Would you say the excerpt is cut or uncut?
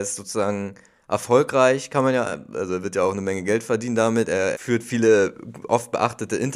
cut